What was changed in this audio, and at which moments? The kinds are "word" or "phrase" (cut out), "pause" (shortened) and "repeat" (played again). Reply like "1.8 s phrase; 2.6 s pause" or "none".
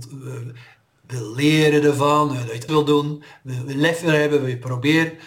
2.7 s word